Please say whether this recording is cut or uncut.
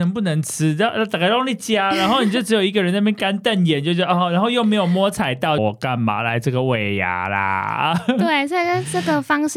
cut